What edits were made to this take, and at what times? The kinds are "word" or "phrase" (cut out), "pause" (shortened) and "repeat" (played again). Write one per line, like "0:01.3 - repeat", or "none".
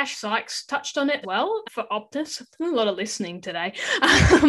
0:01.2 - word
0:01.6 - word